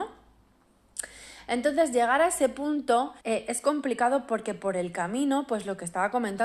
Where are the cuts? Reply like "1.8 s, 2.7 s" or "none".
3.2 s